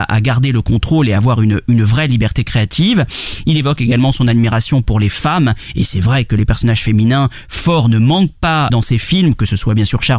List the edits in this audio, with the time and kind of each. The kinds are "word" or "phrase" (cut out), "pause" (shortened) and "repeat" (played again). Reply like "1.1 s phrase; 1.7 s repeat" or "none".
8.7 s word